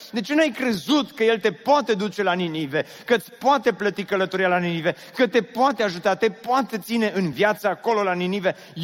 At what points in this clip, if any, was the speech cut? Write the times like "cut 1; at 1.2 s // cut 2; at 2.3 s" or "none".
none